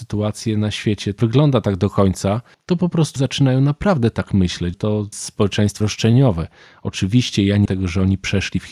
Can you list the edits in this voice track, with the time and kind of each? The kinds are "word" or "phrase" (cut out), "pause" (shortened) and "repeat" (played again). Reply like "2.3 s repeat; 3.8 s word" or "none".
1.2 s word; 3.2 s word; 4.7 s word; 5.1 s word; 5.8 s word; 7.7 s word